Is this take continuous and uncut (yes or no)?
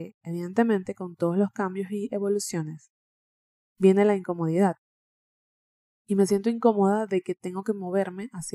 yes